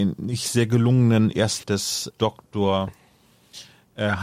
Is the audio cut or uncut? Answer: cut